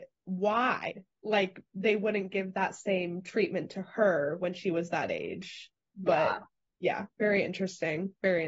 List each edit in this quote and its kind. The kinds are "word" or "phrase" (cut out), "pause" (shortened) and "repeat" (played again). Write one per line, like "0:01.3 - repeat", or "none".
0:07.1 - pause